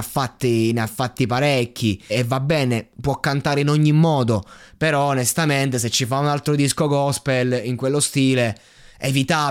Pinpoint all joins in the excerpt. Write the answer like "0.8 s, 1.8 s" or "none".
2.1 s, 2.9 s